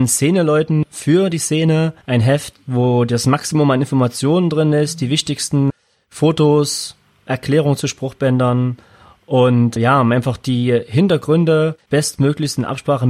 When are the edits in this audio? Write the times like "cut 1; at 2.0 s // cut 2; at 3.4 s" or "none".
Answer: cut 1; at 2.0 s